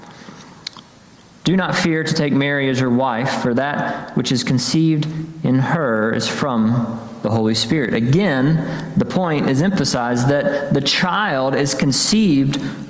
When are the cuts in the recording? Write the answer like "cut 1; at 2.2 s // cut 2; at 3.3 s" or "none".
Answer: none